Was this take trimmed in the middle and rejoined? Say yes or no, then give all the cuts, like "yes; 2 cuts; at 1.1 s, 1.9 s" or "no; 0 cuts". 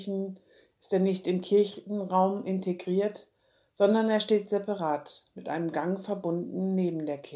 no; 0 cuts